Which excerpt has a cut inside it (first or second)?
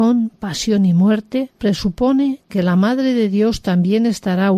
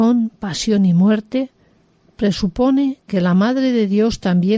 first